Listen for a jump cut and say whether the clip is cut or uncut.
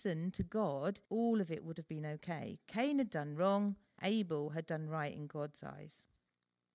cut